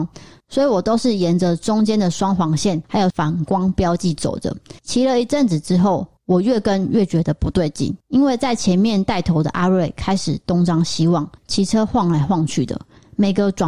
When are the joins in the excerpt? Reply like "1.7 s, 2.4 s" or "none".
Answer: 4.8 s, 6.2 s, 8.0 s, 11.4 s